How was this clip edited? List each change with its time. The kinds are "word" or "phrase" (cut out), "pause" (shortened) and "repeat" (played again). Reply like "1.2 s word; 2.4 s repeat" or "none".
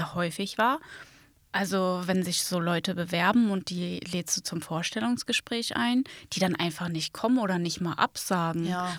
none